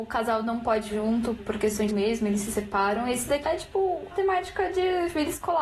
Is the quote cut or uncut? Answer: cut